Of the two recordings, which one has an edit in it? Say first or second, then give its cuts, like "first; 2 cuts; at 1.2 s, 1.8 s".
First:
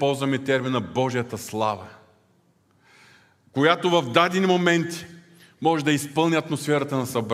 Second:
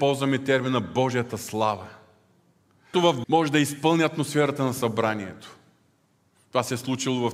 second; 2 cuts; at 2.9 s, 3.2 s